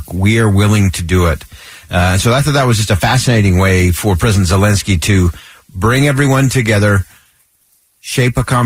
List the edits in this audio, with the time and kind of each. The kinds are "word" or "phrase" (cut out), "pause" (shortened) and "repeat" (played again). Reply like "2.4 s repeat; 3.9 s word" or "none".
none